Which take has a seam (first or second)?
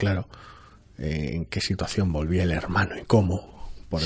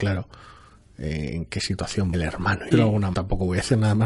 second